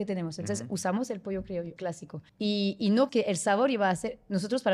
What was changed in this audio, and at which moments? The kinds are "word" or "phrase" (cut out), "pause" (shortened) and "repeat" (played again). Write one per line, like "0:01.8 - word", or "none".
0:01.8 - word
0:02.3 - pause
0:03.1 - word